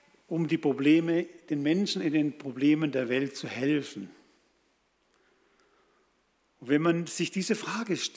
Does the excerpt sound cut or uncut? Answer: uncut